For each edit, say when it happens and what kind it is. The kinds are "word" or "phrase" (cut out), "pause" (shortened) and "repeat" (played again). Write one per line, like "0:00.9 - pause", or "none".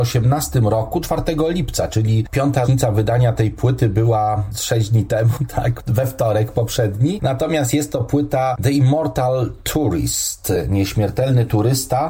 0:01.0 - word
0:02.6 - word